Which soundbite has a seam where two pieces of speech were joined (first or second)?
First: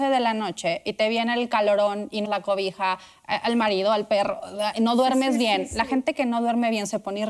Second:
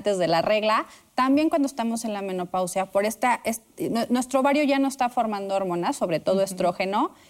first